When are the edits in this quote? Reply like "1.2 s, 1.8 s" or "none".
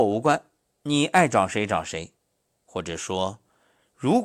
2.2 s